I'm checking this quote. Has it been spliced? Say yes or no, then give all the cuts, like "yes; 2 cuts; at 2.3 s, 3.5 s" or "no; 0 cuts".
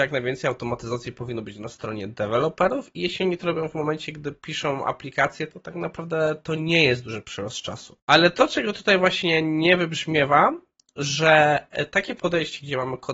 yes; 1 cut; at 8.0 s